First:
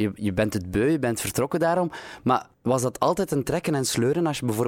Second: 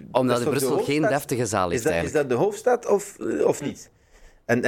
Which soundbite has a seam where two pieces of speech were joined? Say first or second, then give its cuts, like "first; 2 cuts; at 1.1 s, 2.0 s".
first; 1 cut; at 2.5 s